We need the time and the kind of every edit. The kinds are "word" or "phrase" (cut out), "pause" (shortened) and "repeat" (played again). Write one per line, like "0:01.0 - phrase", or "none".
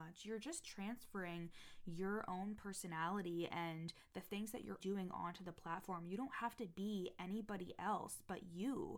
0:04.8 - word